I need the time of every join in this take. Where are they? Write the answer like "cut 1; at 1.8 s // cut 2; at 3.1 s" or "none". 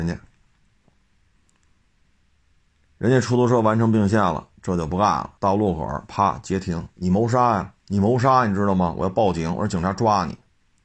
cut 1; at 5.4 s // cut 2; at 7.8 s